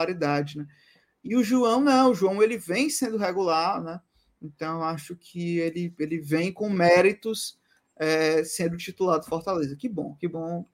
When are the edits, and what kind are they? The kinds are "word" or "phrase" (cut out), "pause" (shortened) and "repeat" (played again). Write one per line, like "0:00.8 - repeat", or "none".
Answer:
none